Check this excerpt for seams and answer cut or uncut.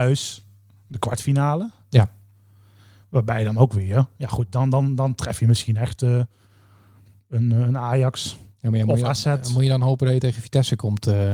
uncut